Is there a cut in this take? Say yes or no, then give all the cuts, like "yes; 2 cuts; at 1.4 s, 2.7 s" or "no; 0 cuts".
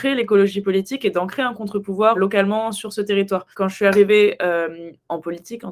yes; 2 cuts; at 2.2 s, 3.5 s